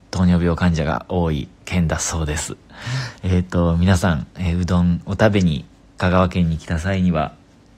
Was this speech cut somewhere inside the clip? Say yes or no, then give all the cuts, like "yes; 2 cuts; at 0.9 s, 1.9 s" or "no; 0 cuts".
yes; 3 cuts; at 1.5 s, 4.3 s, 6.0 s